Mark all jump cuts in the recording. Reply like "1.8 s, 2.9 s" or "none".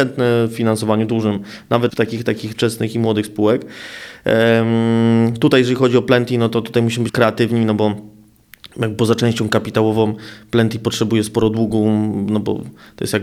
1.9 s, 2.5 s, 7.1 s